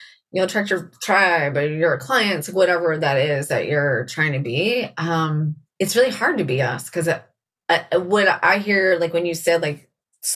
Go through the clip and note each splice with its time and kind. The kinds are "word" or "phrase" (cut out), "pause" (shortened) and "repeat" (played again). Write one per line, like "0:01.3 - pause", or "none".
0:05.7 - pause